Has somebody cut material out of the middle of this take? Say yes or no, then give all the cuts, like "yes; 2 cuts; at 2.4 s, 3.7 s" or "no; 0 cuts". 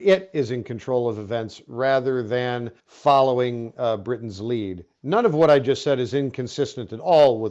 yes; 1 cut; at 2.8 s